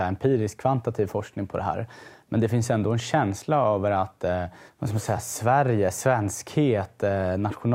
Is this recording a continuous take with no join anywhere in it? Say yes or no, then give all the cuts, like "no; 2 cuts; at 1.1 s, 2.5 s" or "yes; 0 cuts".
no; 1 cut; at 4.7 s